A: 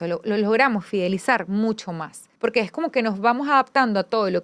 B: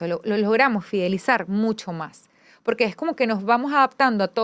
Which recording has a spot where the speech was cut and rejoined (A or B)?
A